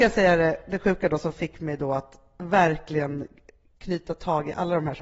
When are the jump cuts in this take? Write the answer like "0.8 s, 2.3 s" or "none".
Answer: none